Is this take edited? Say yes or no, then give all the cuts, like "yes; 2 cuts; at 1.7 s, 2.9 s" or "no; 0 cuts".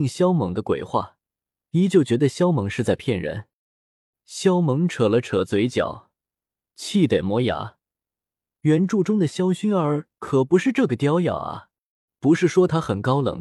no; 0 cuts